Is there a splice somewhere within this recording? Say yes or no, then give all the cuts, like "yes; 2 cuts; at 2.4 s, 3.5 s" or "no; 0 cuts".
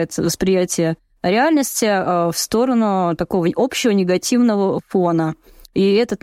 no; 0 cuts